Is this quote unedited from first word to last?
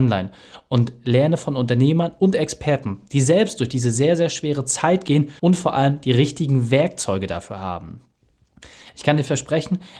no; 1 cut; at 5.4 s

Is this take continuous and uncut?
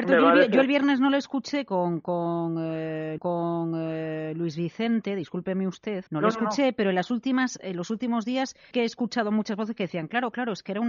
no; 3 cuts; at 3.2 s, 6.1 s, 8.7 s

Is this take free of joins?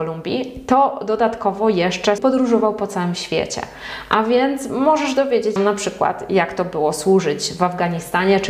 no; 2 cuts; at 2.2 s, 5.6 s

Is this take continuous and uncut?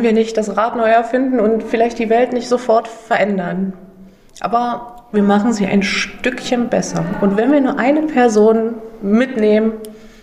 yes; 0 cuts

